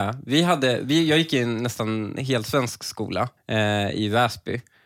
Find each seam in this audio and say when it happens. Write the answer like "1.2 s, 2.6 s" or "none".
3.4 s